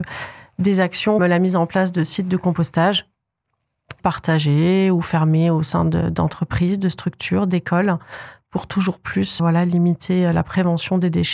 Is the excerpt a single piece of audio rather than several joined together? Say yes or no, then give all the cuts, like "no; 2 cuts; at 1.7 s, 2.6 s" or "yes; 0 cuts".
no; 3 cuts; at 1.2 s, 4.0 s, 9.4 s